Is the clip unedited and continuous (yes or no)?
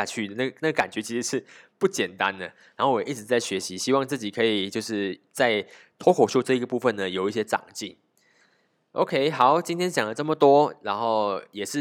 yes